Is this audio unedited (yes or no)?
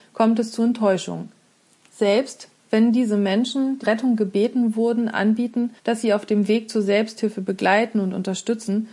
no